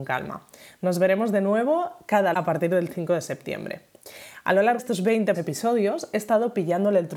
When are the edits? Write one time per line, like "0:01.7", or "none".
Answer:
0:02.3
0:04.8
0:05.3